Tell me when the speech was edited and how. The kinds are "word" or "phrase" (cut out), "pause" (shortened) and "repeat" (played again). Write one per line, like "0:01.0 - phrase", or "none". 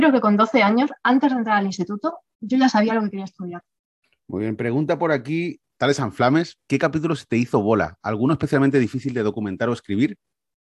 none